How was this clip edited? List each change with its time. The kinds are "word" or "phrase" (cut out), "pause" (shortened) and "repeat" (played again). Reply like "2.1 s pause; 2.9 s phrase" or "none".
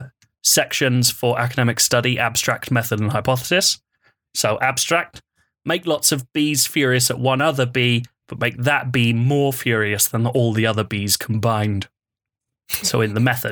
none